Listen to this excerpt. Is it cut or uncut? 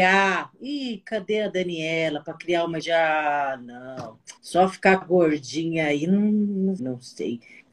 cut